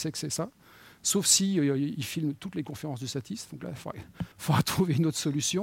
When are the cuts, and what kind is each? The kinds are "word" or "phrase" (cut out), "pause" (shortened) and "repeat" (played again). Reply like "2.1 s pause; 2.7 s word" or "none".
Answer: 4.3 s pause